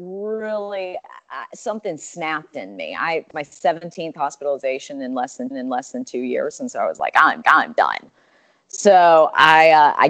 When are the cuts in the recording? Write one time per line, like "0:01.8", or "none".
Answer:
0:03.3
0:05.5
0:07.4